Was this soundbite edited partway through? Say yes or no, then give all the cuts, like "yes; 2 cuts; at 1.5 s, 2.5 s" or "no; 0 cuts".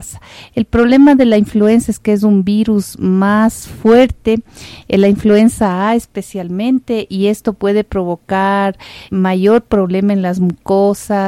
yes; 1 cut; at 9.1 s